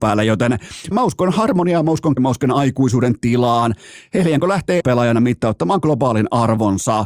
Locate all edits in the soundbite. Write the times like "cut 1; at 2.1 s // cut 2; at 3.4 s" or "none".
cut 1; at 0.9 s // cut 2; at 2.2 s // cut 3; at 4.8 s

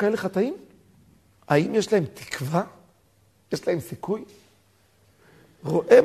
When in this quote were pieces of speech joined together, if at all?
none

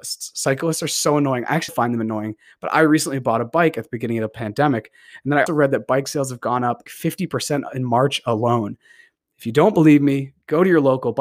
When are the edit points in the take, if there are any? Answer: cut 1; at 1.7 s // cut 2; at 5.5 s // cut 3; at 6.9 s

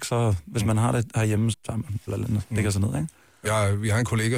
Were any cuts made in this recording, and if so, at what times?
cut 1; at 1.5 s // cut 2; at 2.1 s // cut 3; at 3.5 s

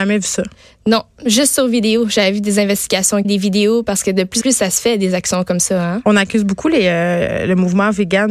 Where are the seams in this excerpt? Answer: cut 1; at 3.2 s // cut 2; at 4.4 s

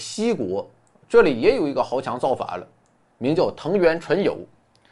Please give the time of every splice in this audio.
none

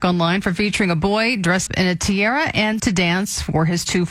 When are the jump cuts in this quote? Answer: cut 1; at 1.7 s // cut 2; at 2.8 s

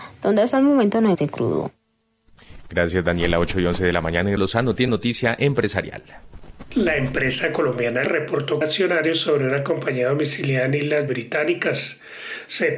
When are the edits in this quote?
cut 1; at 1.1 s // cut 2; at 4.4 s // cut 3; at 4.9 s // cut 4; at 8.0 s // cut 5; at 8.6 s // cut 6; at 11.1 s

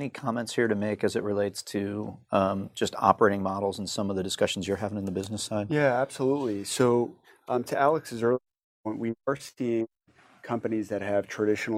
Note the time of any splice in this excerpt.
none

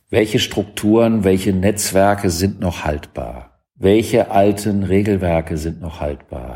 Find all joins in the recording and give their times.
cut 1; at 3.7 s

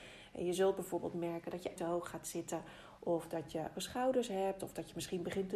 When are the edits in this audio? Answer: cut 1; at 1.8 s // cut 2; at 3.7 s

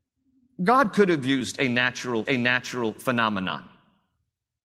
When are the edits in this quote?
cut 1; at 2.3 s

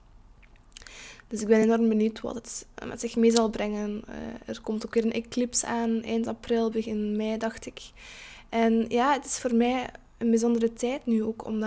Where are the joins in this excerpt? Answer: none

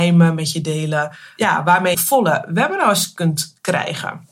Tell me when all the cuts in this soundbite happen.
cut 1; at 1.9 s

